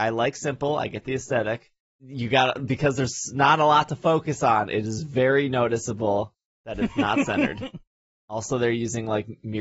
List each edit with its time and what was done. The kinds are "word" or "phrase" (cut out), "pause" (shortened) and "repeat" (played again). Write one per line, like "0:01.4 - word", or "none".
none